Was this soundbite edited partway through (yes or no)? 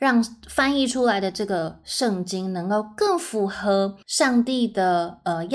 yes